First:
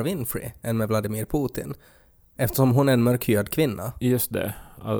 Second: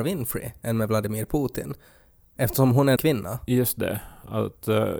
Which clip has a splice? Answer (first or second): second